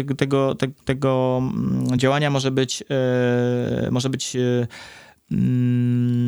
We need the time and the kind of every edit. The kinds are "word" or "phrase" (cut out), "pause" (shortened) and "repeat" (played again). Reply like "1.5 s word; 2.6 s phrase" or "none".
none